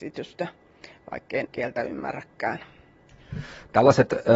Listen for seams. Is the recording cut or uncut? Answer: cut